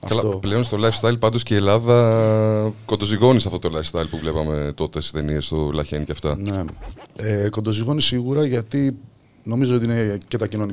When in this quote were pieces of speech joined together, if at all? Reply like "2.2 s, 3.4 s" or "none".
none